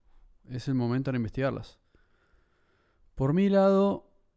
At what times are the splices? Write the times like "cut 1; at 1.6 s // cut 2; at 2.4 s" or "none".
cut 1; at 1.1 s